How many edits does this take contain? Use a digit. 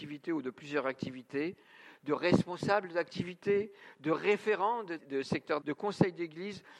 2